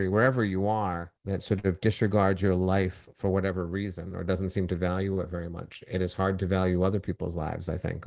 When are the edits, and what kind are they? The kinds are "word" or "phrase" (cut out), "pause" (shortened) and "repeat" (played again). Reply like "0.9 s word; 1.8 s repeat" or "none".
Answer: 1.2 s pause